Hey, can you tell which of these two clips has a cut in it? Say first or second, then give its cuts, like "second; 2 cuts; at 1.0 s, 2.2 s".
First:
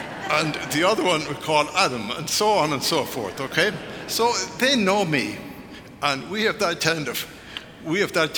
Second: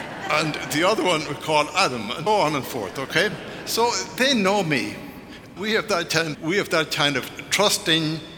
second; 4 cuts; at 2.3 s, 2.6 s, 5.6 s, 6.3 s